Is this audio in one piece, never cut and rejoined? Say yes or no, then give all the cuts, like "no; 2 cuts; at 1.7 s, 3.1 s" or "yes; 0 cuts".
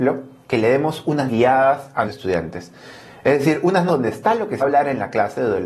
no; 4 cuts; at 1.3 s, 2.1 s, 3.9 s, 4.6 s